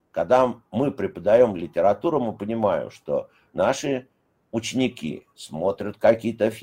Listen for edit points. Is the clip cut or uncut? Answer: uncut